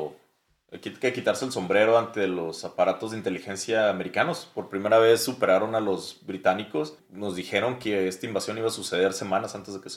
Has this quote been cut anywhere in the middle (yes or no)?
no